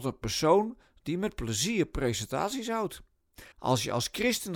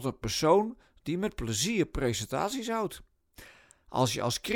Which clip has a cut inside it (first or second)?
first